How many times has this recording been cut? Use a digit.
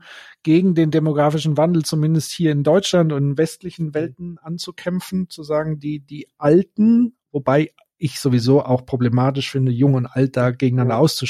0